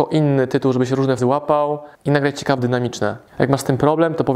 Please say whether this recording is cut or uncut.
cut